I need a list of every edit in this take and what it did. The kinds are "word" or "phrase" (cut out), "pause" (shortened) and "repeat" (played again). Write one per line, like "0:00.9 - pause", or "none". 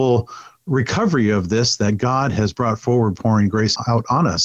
none